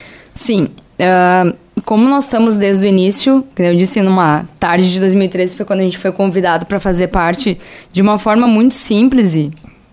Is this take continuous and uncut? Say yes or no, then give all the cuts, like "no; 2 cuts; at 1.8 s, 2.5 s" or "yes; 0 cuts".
yes; 0 cuts